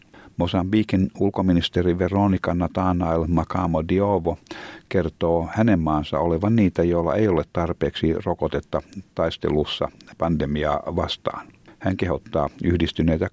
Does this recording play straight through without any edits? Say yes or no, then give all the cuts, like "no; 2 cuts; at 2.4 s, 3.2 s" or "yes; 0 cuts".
yes; 0 cuts